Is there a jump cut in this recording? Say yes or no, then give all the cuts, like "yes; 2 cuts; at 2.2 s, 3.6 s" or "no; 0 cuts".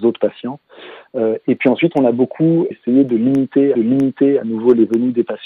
yes; 2 cuts; at 2.7 s, 3.7 s